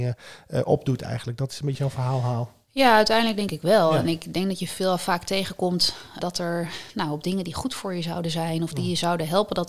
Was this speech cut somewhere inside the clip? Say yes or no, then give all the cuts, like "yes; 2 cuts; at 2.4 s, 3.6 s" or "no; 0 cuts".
yes; 2 cuts; at 1.7 s, 6.2 s